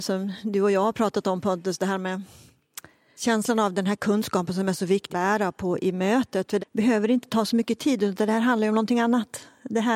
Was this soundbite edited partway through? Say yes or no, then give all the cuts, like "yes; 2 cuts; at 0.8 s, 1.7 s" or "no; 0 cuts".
yes; 3 cuts; at 3.2 s, 5.1 s, 6.6 s